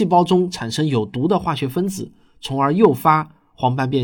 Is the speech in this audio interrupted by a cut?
no; 0 cuts

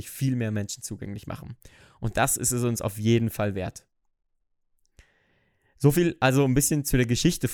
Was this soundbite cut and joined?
no; 0 cuts

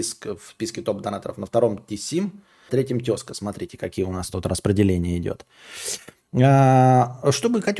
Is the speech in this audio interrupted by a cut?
yes; 1 cut; at 2.7 s

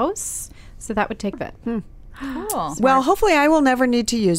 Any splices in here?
yes; 1 cut; at 1.3 s

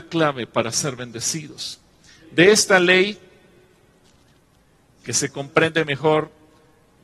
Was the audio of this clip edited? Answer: no; 0 cuts

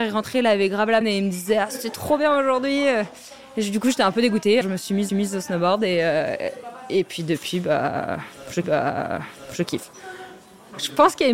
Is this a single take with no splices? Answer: no; 4 cuts; at 1.0 s, 4.6 s, 5.1 s, 8.6 s

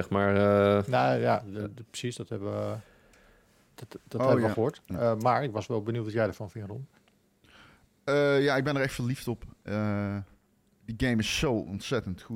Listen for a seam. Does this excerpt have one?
no; 0 cuts

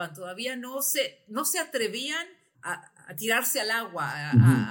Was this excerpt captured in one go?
no; 1 cut; at 2.5 s

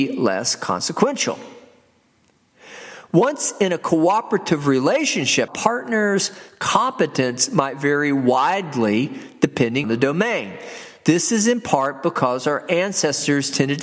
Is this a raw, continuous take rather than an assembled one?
no; 2 cuts; at 5.5 s, 9.8 s

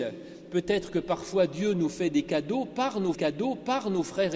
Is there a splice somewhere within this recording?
yes; 1 cut; at 3.1 s

